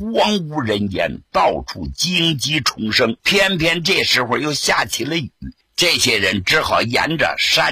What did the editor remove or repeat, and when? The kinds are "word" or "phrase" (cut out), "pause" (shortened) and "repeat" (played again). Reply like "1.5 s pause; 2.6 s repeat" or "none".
3.2 s pause; 5.6 s pause